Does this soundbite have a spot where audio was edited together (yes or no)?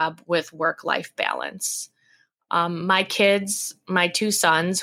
no